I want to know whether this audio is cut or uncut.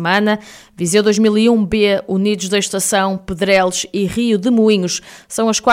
uncut